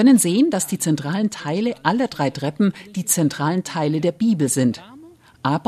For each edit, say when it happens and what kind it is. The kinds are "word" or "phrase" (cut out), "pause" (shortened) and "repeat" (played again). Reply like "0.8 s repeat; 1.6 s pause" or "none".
none